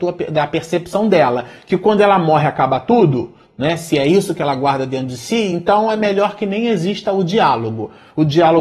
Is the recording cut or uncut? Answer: uncut